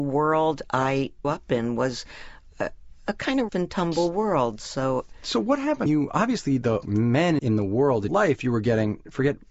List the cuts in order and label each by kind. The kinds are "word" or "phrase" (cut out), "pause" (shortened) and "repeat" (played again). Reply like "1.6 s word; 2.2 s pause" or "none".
1.2 s word; 3.5 s word; 5.9 s word; 6.8 s word; 7.4 s word; 8.1 s word